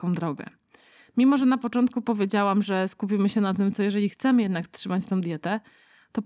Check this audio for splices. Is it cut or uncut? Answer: uncut